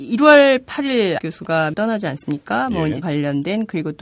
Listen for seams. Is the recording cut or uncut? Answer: cut